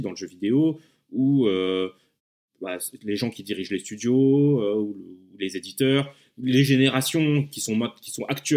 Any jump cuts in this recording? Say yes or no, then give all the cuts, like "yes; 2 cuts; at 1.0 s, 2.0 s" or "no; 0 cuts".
no; 0 cuts